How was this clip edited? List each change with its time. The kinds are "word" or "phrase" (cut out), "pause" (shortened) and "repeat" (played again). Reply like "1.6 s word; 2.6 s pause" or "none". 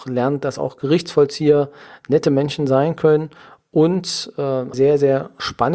4.7 s word